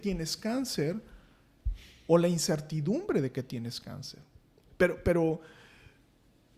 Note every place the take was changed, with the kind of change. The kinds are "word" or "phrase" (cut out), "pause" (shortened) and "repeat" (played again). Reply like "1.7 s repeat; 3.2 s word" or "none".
none

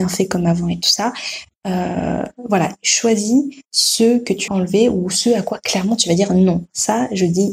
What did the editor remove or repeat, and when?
3.7 s pause; 4.5 s word

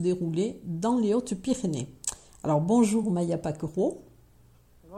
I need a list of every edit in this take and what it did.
none

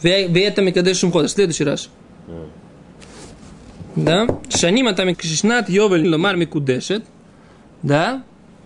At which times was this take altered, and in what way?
2.0 s pause; 5.1 s word; 6.0 s phrase

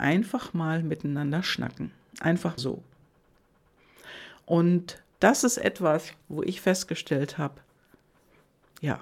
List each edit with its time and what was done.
2.6 s word; 5.1 s pause; 6.2 s pause

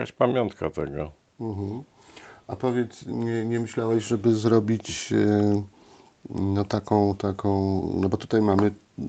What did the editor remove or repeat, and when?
none

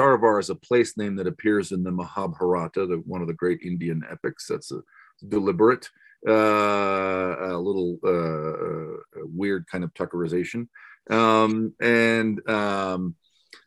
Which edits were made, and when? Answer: none

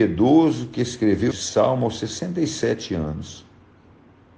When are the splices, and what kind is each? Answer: 1.3 s word

